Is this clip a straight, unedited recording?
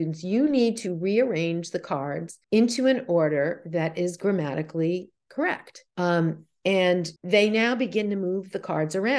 no; 3 cuts; at 2.4 s, 5.9 s, 7.2 s

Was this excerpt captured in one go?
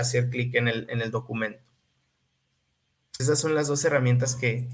no; 1 cut; at 3.2 s

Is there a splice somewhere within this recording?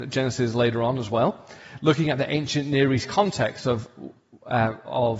no; 0 cuts

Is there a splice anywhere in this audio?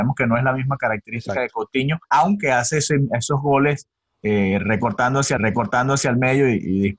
yes; 2 cuts; at 2.0 s, 5.4 s

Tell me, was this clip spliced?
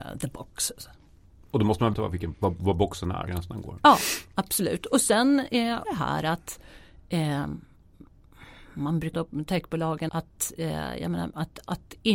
yes; 6 cuts; at 1.9 s, 2.3 s, 3.3 s, 5.8 s, 9.1 s, 10.1 s

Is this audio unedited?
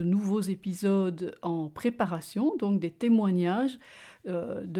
yes; 0 cuts

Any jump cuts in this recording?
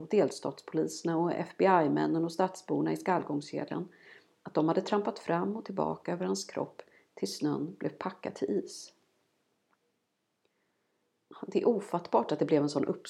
no; 0 cuts

